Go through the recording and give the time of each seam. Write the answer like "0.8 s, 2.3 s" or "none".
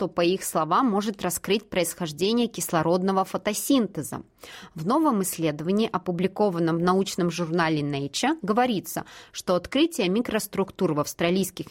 none